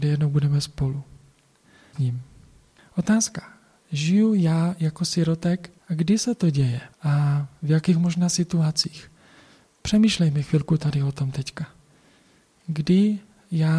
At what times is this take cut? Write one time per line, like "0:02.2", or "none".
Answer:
0:01.9
0:05.8
0:06.9